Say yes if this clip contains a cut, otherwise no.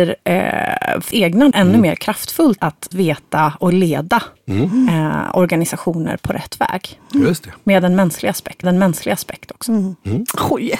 yes